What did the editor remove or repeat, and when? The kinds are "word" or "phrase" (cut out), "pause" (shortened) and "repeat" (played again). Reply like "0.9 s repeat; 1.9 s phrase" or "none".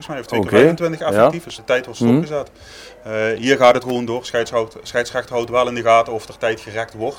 1.6 s word; 3.8 s word